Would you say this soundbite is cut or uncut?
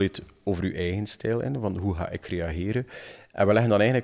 uncut